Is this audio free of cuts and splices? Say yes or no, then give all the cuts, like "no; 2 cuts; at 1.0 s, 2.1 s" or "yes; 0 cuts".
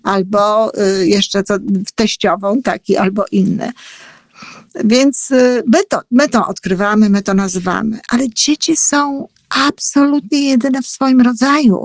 no; 1 cut; at 1.8 s